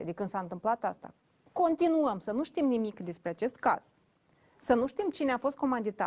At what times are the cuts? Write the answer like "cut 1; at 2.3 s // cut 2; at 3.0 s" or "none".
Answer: none